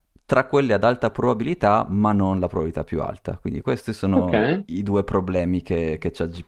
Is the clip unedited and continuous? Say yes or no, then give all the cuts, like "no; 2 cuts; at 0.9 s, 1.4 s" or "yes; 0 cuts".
yes; 0 cuts